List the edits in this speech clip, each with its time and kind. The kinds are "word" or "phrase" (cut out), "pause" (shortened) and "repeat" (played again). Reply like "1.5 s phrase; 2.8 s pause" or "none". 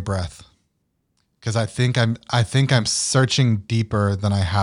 none